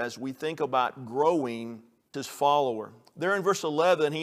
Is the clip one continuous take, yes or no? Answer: no